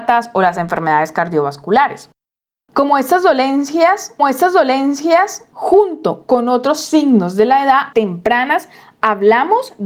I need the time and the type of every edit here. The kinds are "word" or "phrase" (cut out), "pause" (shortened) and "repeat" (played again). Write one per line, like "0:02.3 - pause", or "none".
0:04.2 - repeat
0:07.9 - phrase

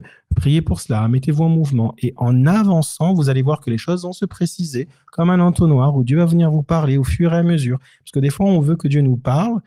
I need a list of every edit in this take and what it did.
0:02.2 - word

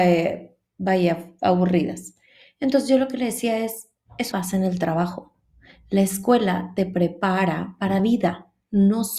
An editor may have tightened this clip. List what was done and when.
0:04.3 - word
0:08.0 - word

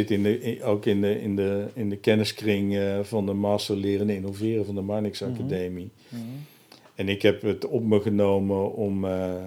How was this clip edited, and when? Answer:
none

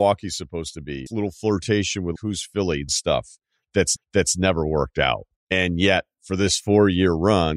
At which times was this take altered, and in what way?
0:01.1 - word
0:02.2 - word
0:02.9 - word
0:04.0 - repeat
0:05.4 - pause

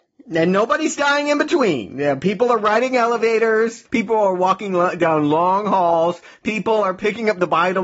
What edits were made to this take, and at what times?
none

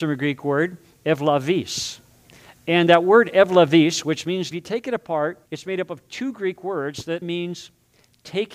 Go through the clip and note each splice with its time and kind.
0:04.5 - phrase
0:05.5 - pause
0:07.2 - word

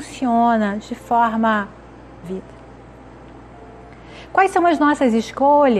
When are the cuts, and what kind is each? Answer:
0:02.2 - phrase

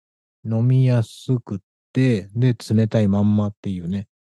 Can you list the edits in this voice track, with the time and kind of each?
none

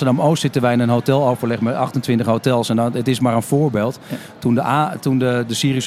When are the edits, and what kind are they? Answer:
none

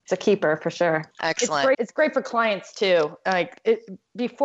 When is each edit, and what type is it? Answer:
0:01.1 - pause
0:01.7 - word

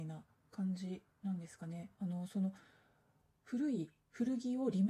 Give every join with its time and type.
none

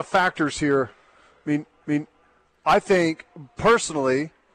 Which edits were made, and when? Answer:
0:01.8 - repeat

